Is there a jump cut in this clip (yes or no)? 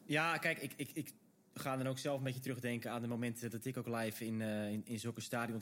no